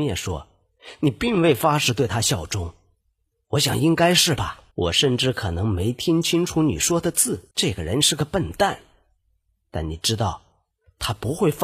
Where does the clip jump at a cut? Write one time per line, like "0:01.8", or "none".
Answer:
0:04.7
0:07.5